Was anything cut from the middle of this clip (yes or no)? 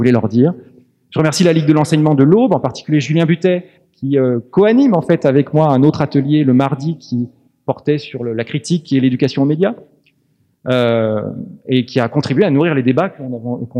no